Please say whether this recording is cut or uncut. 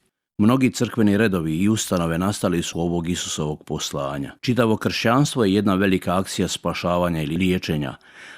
cut